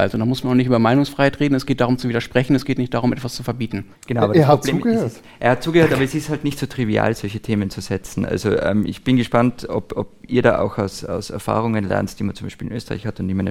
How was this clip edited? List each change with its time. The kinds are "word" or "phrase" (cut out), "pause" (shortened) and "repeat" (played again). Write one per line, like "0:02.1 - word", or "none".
0:03.9 - pause